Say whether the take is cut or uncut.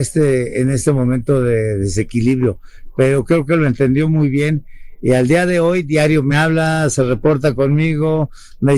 uncut